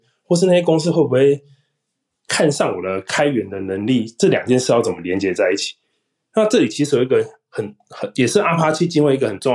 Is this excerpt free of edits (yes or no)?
yes